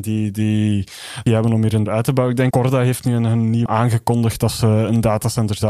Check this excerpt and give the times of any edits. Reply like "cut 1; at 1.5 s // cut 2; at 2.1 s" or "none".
cut 1; at 1.3 s // cut 2; at 1.9 s // cut 3; at 2.5 s // cut 4; at 3.7 s

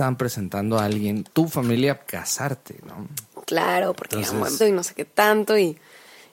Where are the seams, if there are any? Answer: cut 1; at 1.3 s // cut 2; at 2.1 s // cut 3; at 4.6 s

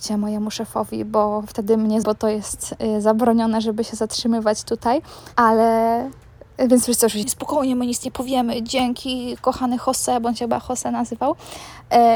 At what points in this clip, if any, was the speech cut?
cut 1; at 2.0 s // cut 2; at 5.3 s // cut 3; at 7.2 s

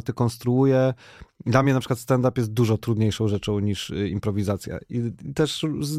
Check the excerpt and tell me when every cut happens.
none

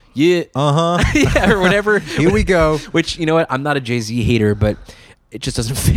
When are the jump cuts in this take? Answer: none

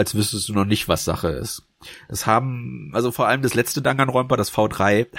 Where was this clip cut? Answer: none

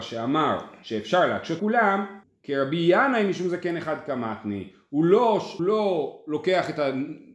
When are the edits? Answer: cut 1; at 1.6 s // cut 2; at 2.2 s // cut 3; at 5.6 s

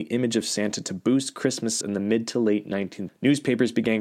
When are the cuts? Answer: cut 1; at 1.8 s // cut 2; at 3.1 s

